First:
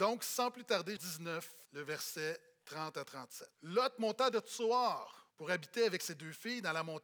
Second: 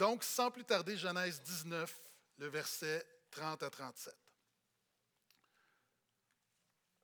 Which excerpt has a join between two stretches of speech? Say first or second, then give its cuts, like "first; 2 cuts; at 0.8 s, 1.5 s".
first; 4 cuts; at 1.0 s, 1.7 s, 3.5 s, 5.3 s